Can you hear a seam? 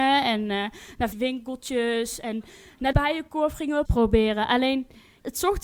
yes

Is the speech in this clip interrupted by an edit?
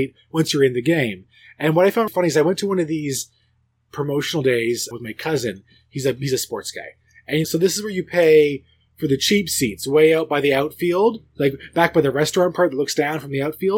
yes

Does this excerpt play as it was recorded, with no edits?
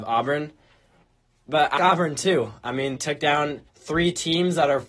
no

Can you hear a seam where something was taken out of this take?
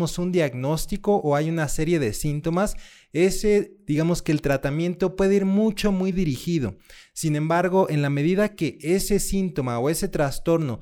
no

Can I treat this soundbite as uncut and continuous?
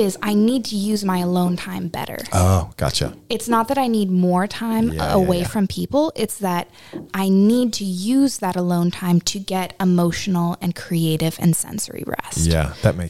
no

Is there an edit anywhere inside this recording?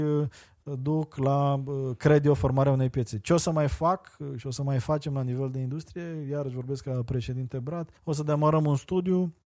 yes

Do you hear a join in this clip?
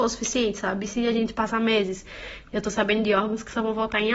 no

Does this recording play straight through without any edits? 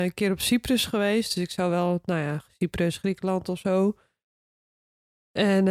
yes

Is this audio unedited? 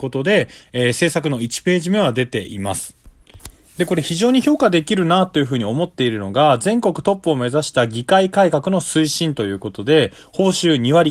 yes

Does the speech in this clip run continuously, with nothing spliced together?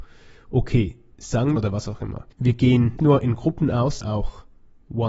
no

